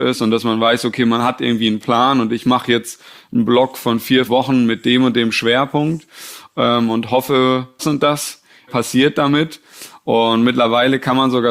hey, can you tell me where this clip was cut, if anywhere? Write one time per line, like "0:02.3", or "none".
0:04.3
0:07.8
0:08.7